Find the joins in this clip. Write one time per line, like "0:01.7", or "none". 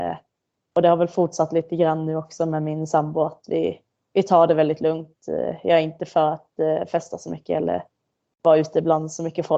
none